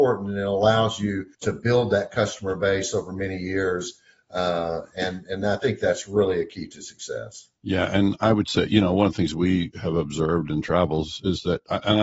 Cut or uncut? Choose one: cut